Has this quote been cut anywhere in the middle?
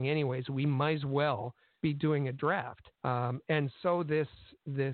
yes; 1 cut; at 2.9 s

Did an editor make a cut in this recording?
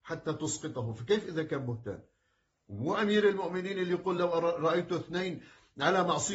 no; 0 cuts

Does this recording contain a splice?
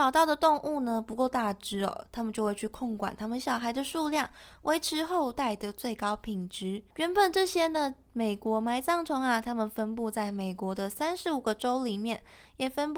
yes; 1 cut; at 6.9 s

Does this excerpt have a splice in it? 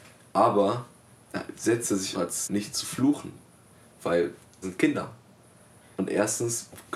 yes; 4 cuts; at 1.1 s, 2.1 s, 2.4 s, 4.6 s

